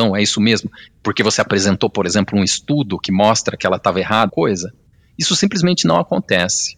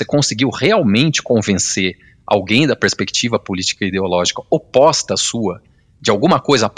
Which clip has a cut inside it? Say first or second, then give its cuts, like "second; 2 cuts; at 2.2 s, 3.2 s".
first; 1 cut; at 4.3 s